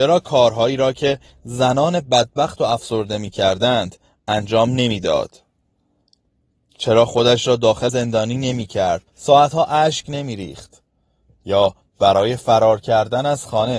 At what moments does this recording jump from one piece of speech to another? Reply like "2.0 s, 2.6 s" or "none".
7.9 s, 9.1 s